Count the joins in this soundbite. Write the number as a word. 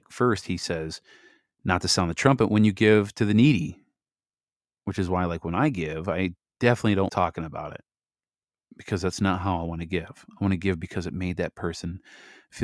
one